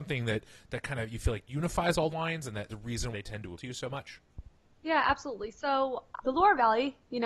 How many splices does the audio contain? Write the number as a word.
five